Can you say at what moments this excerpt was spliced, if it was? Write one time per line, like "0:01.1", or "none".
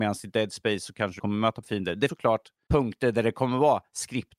0:01.2
0:01.6
0:02.1